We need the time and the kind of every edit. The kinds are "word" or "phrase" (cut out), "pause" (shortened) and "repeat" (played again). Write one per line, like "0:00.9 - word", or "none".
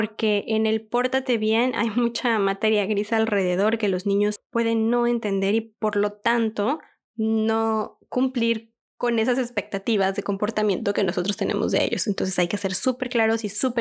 none